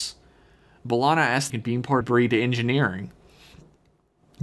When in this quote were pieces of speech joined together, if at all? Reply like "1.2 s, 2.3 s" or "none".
1.5 s, 2.0 s